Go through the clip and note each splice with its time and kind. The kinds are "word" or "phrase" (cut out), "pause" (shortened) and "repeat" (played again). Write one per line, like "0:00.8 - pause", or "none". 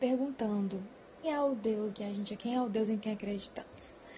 0:01.2 - word
0:01.9 - word
0:02.4 - word

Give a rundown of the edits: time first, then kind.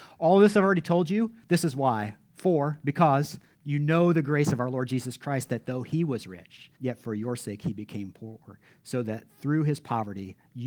0:03.5 - pause
0:06.8 - pause

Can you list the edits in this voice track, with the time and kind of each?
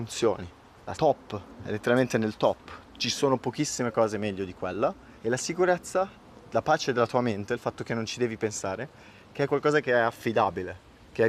0:01.0 - phrase
0:02.8 - word
0:05.2 - pause

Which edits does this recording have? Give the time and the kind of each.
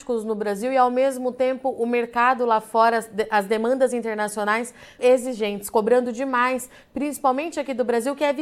0:05.0 - word

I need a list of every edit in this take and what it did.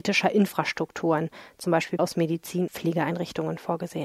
0:02.0 - word
0:02.7 - word

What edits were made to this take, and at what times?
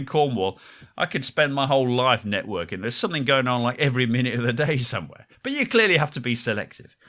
0:05.3 - pause

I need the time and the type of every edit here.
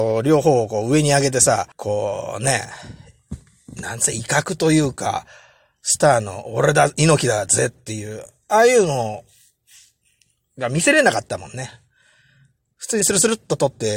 0:01.7 - pause

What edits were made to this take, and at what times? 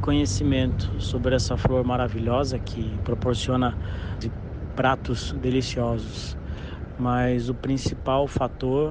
0:04.2 - word

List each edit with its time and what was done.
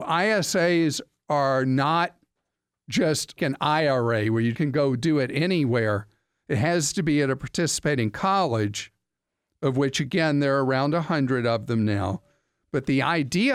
0:03.4 - word
0:04.5 - word

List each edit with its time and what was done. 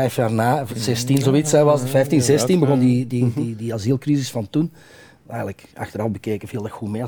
none

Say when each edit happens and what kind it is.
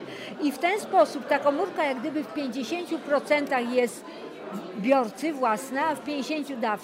none

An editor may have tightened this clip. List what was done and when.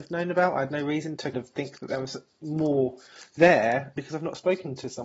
0:01.3 - word
0:04.0 - word

